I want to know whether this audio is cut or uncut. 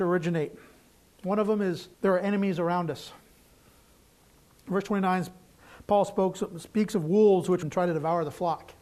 cut